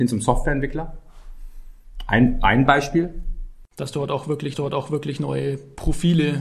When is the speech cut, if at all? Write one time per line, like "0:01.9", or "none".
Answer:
0:04.5

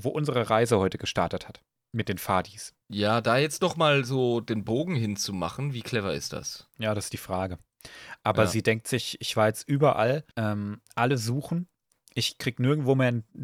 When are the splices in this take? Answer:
0:01.7
0:02.8
0:10.3

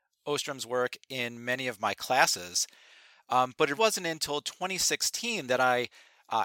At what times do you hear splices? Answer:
0:03.8

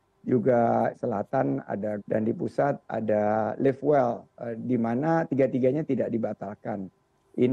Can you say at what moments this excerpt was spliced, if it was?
0:00.9
0:02.0
0:04.3

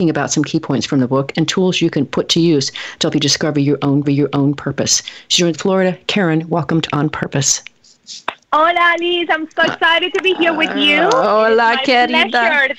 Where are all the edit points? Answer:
0:04.0
0:05.5
0:06.9
0:08.4

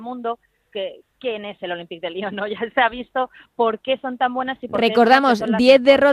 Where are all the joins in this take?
none

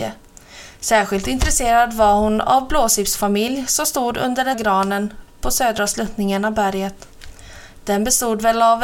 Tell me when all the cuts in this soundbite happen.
0:04.5

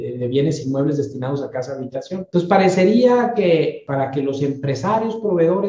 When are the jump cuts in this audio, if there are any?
none

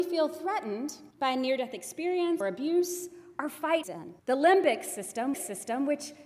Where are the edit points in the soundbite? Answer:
0:01.1
0:02.4
0:03.8
0:04.2
0:05.3

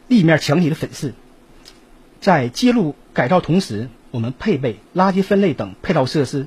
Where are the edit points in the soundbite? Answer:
none

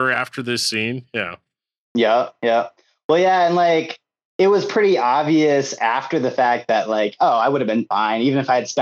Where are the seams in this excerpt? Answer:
none

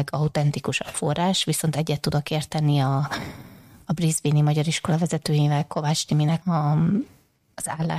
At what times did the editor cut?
0:06.4

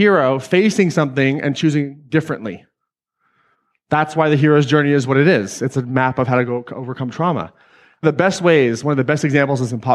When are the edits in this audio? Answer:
0:08.0

